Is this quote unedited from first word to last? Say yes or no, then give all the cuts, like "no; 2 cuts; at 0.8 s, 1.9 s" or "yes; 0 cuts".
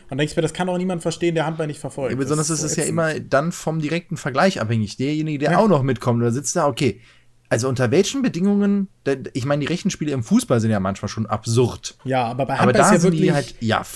yes; 0 cuts